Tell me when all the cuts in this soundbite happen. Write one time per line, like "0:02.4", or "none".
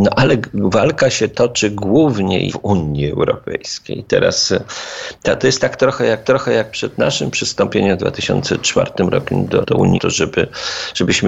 0:02.5
0:06.2
0:09.6
0:10.0